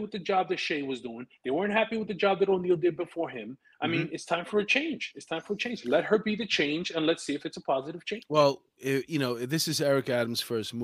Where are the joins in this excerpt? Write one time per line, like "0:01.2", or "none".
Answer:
none